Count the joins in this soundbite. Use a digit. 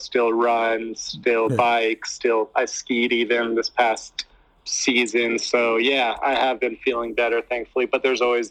0